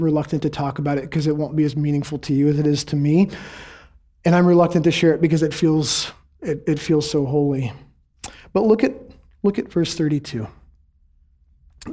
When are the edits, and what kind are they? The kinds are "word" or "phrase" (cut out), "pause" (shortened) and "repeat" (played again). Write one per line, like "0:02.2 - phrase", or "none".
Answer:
none